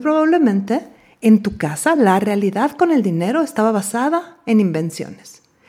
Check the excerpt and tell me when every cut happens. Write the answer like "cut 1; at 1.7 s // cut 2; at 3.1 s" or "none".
none